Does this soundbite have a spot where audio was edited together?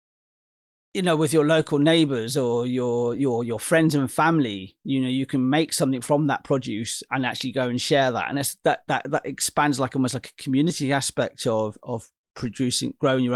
no; 0 cuts

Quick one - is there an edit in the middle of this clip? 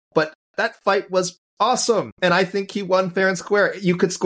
no; 0 cuts

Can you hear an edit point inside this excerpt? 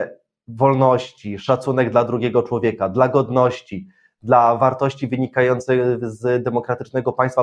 no; 0 cuts

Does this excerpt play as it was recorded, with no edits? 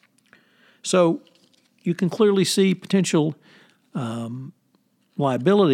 yes; 0 cuts

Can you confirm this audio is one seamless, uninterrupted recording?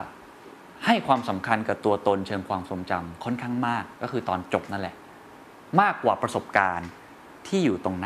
no; 1 cut; at 4.0 s

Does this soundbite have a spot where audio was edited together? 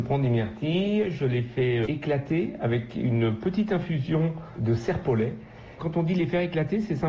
no; 0 cuts

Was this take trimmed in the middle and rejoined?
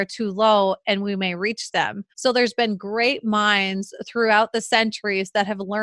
yes; 1 cut; at 2.1 s

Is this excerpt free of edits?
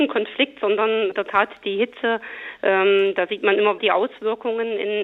no; 2 cuts; at 1.1 s, 3.8 s

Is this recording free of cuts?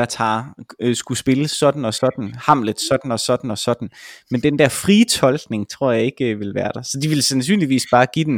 yes; 0 cuts

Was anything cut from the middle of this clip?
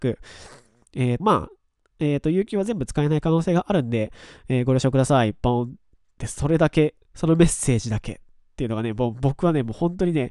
yes; 2 cuts; at 1.2 s, 7.0 s

